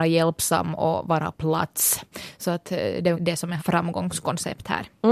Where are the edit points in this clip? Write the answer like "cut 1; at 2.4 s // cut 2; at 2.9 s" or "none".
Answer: cut 1; at 1.3 s // cut 2; at 3.1 s // cut 3; at 3.6 s